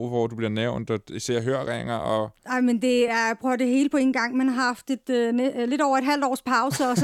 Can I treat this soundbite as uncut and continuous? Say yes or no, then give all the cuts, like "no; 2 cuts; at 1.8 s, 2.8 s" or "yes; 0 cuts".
yes; 0 cuts